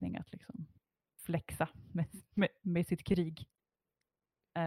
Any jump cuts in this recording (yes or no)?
no